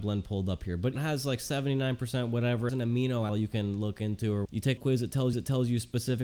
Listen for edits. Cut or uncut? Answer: cut